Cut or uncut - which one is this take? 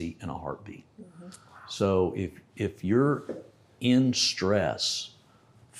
uncut